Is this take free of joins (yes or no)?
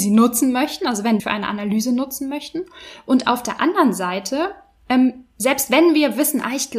no